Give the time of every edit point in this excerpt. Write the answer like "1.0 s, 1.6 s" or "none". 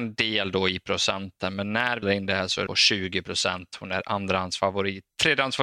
2.0 s, 2.7 s